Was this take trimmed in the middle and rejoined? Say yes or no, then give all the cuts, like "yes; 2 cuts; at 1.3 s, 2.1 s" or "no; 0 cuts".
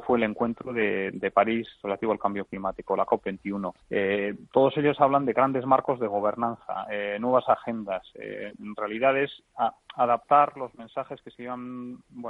yes; 1 cut; at 3.8 s